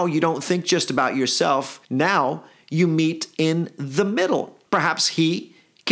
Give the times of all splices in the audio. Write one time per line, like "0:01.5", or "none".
0:01.8
0:04.7